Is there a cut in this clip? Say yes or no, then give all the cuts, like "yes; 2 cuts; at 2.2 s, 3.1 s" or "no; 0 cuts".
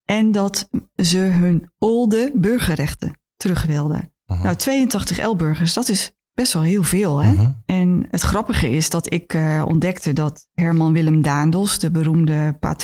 no; 0 cuts